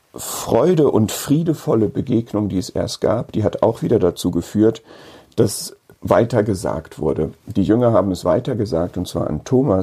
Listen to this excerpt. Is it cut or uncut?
uncut